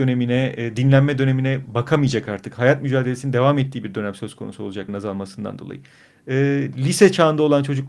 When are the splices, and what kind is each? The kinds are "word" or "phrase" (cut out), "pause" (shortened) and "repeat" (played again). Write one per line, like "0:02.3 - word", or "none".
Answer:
0:04.9 - word